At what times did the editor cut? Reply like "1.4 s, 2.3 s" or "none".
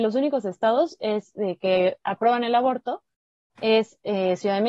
none